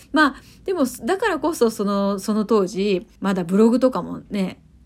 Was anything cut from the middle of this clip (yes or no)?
yes